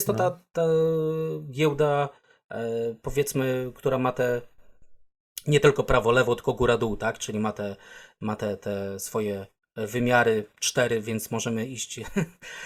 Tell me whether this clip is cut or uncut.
uncut